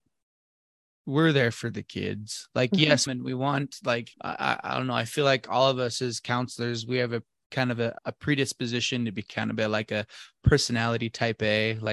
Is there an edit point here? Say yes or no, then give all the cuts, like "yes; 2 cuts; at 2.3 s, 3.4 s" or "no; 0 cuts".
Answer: yes; 3 cuts; at 3.1 s, 4.1 s, 8.0 s